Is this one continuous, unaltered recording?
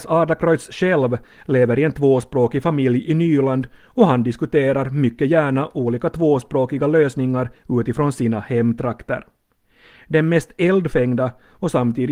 yes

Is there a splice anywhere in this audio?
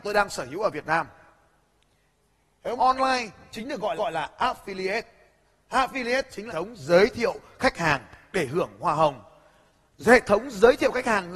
yes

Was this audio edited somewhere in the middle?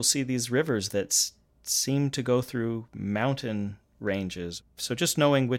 no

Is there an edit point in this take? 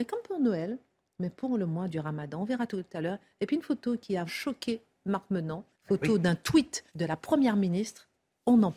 yes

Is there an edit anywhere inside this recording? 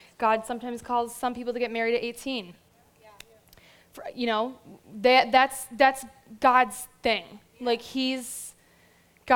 no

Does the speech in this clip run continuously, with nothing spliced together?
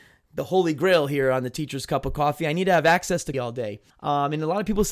no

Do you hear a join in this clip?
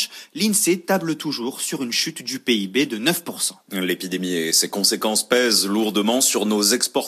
no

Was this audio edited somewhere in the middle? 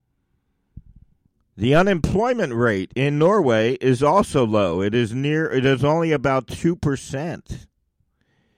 no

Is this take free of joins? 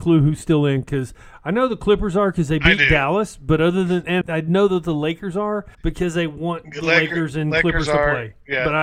no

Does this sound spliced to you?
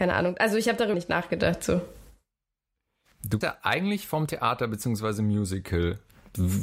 yes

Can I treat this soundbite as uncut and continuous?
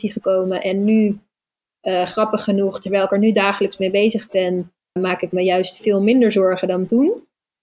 no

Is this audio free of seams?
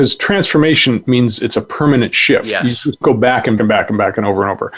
no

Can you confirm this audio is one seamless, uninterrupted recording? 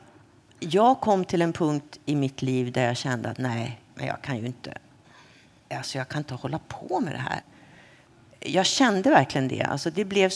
yes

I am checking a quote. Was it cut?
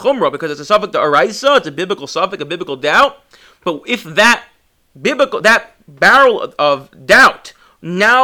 no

